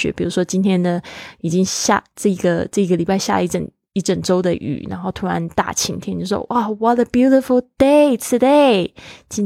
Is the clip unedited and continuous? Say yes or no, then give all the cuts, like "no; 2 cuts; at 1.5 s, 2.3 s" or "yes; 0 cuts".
yes; 0 cuts